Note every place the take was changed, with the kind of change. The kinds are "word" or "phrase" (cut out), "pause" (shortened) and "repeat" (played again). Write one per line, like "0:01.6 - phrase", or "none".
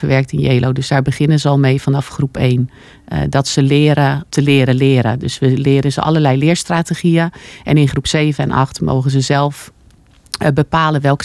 0:04.3 - word